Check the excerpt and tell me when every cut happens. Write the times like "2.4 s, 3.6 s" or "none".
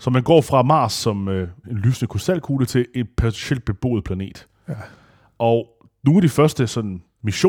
1.6 s

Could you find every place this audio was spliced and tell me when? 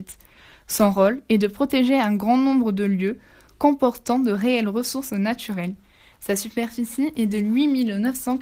none

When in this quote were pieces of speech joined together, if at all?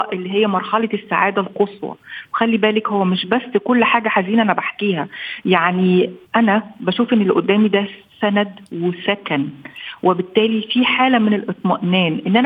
6.3 s

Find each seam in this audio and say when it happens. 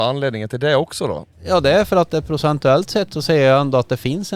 1.3 s

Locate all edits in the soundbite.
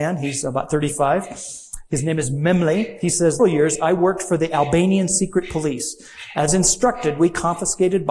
3.4 s

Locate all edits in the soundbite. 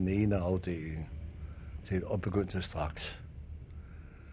1.8 s

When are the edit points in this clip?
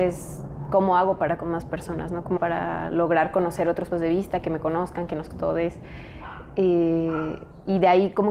1.4 s, 2.4 s, 3.9 s, 5.3 s

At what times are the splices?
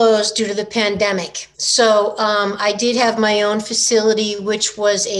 1.5 s

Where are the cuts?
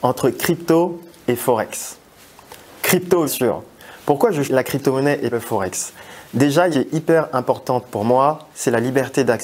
3.3 s, 4.4 s, 5.3 s, 6.7 s, 8.5 s

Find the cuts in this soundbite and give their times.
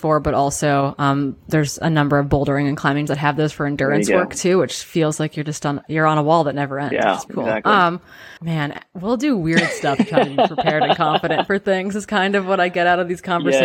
3.1 s, 7.3 s, 8.4 s

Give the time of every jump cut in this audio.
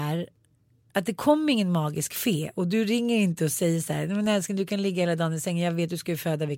none

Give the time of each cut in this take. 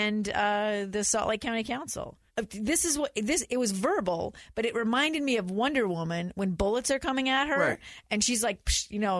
2.3 s

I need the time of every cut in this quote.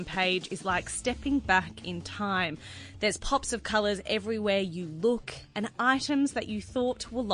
none

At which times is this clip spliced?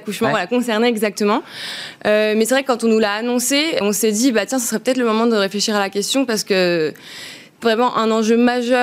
3.8 s, 7.6 s

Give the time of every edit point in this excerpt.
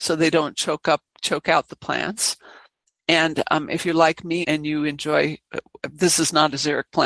4.4 s

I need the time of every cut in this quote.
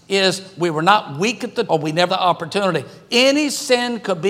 1.7 s, 2.1 s

